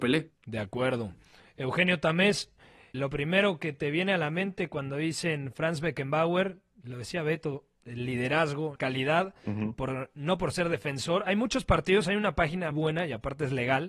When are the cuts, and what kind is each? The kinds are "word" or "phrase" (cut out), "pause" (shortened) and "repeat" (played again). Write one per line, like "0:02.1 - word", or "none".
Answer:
0:02.9 - word
0:08.8 - word
0:12.7 - word